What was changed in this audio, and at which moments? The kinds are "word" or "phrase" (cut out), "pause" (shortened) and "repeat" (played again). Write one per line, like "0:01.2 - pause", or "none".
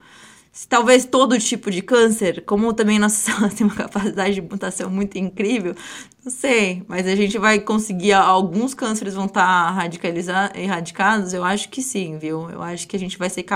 none